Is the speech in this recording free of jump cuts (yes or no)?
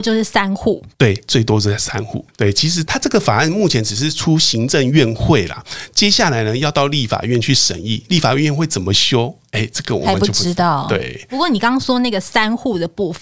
no